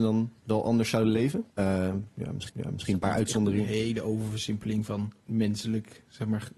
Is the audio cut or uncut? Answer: cut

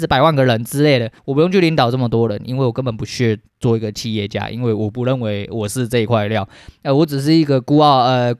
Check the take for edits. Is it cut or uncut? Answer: cut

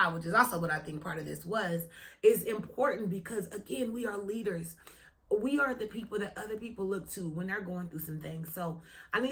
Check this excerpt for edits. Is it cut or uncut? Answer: uncut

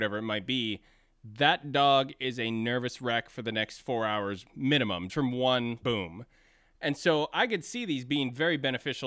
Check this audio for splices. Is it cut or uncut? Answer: cut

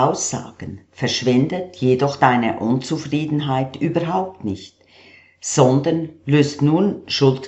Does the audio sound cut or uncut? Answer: uncut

